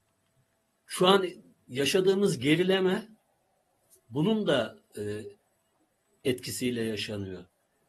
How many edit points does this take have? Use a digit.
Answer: 0